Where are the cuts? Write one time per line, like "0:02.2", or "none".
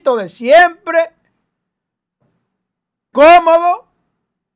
0:03.1